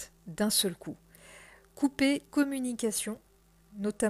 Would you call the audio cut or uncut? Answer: cut